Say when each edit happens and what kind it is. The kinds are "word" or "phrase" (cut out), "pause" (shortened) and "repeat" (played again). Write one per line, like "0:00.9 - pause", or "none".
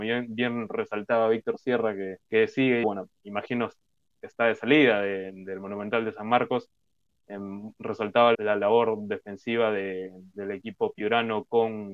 0:02.2 - pause
0:02.8 - word
0:03.2 - word
0:08.3 - word